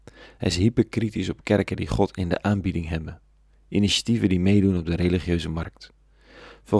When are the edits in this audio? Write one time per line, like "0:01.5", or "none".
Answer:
none